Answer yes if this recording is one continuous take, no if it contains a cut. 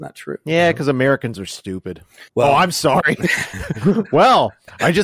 no